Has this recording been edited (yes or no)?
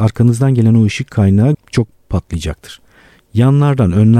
yes